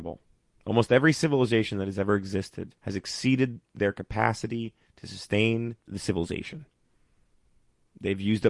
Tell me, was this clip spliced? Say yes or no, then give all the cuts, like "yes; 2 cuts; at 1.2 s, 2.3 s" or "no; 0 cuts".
yes; 2 cuts; at 2.8 s, 5.8 s